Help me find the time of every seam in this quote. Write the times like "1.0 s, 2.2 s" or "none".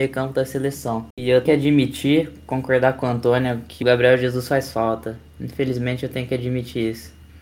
1.1 s, 1.5 s, 3.8 s